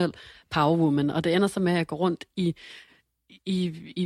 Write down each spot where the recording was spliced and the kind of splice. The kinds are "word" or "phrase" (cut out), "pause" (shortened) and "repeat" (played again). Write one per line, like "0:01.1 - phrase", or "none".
none